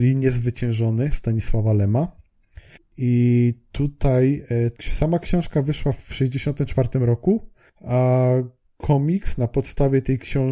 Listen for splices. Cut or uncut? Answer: cut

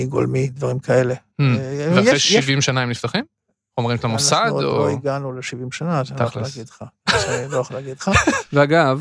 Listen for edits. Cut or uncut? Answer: uncut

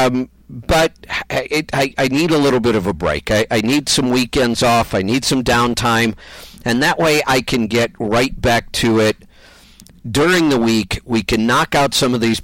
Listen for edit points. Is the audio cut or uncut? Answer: uncut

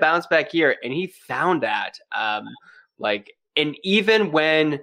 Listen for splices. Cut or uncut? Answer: uncut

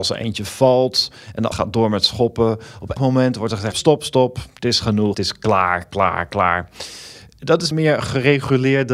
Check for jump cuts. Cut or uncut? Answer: cut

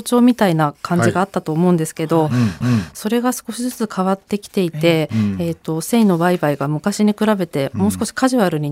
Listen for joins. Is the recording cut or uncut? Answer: cut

